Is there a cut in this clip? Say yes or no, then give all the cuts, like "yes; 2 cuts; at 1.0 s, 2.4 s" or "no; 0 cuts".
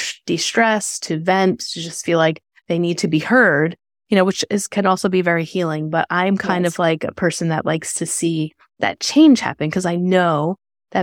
no; 0 cuts